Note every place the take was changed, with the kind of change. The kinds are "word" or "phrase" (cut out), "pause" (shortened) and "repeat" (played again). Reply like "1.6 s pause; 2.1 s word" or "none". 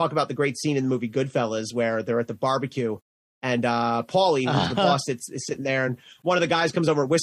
none